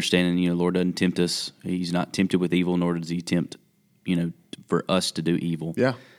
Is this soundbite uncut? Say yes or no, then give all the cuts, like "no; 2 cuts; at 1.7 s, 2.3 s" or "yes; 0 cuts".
yes; 0 cuts